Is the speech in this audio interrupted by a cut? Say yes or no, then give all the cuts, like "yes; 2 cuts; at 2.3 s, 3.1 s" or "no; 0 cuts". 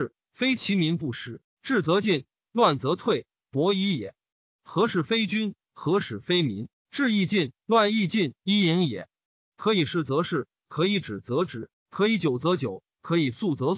yes; 2 cuts; at 7.6 s, 8.4 s